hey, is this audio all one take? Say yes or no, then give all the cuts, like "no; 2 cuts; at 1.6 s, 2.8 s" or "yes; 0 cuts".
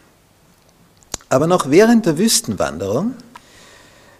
yes; 0 cuts